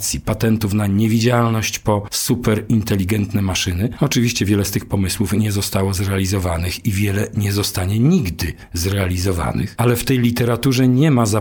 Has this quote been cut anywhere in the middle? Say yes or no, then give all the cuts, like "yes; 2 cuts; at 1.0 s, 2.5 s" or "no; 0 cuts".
no; 0 cuts